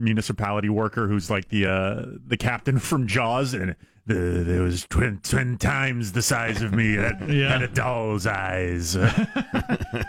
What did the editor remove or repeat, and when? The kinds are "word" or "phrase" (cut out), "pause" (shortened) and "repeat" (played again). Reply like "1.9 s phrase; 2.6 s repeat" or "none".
none